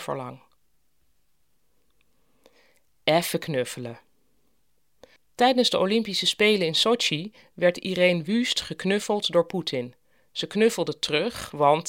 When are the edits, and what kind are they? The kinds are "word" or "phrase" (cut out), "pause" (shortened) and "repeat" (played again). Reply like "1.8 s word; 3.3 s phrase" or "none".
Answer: none